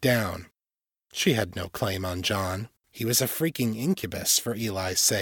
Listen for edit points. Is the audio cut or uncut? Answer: cut